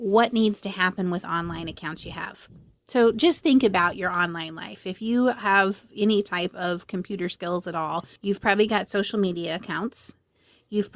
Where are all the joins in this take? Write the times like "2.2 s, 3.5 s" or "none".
8.2 s